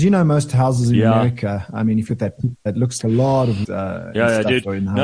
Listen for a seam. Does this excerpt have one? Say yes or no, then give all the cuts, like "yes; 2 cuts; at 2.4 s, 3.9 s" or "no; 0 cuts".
yes; 4 cuts; at 2.1 s, 2.7 s, 3.0 s, 3.6 s